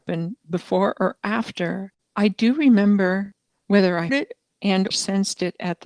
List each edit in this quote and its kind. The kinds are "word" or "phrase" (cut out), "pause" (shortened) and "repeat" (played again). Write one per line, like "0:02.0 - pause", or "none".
0:04.1 - word
0:04.9 - word